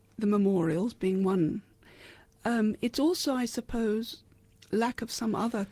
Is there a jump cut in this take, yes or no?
no